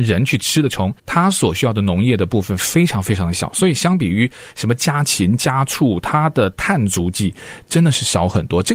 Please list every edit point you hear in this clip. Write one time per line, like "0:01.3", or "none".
0:01.0